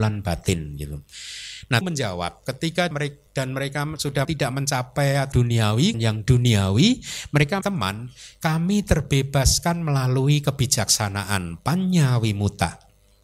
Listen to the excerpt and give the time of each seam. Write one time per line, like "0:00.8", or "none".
0:01.8
0:02.9
0:03.3
0:04.2
0:05.3
0:05.9
0:07.6